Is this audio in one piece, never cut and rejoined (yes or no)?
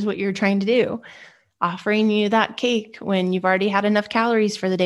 yes